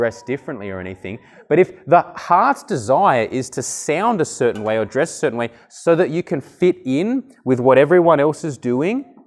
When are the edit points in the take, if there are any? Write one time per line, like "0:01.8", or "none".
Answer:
none